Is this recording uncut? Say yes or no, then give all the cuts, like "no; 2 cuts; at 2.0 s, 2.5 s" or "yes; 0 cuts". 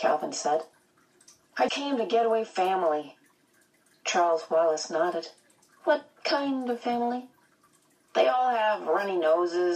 no; 2 cuts; at 1.7 s, 2.5 s